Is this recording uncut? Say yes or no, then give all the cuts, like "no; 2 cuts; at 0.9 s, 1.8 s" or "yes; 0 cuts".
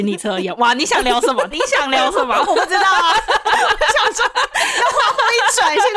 no; 1 cut; at 1.5 s